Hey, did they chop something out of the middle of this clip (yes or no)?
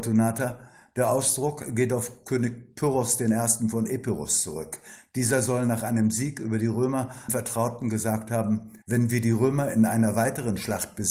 yes